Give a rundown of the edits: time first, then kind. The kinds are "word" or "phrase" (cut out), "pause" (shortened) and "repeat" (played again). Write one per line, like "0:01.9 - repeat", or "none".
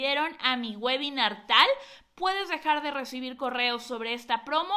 none